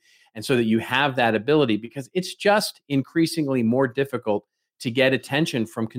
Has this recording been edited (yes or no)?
no